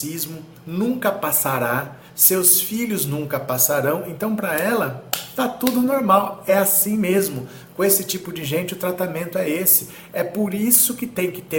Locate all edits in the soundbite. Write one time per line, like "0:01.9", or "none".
none